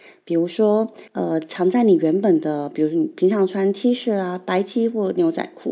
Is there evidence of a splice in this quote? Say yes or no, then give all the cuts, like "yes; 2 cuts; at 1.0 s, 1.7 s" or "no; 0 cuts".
yes; 1 cut; at 1.1 s